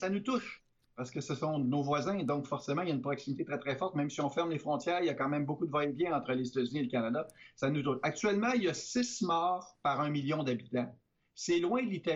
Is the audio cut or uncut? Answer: uncut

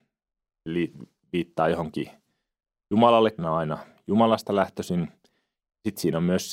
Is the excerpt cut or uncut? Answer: cut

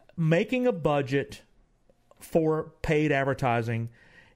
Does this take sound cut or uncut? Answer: uncut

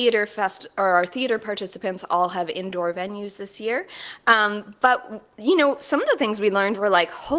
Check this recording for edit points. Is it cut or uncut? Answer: uncut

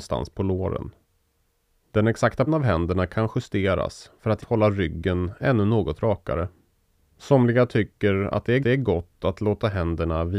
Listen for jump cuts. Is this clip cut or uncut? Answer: cut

